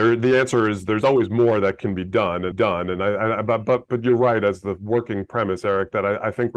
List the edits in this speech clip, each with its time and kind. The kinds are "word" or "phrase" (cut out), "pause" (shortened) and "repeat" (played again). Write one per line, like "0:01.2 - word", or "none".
0:02.5 - repeat